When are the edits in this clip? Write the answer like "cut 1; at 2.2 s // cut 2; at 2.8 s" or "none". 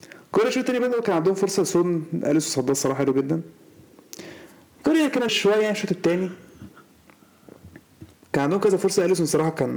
cut 1; at 5.3 s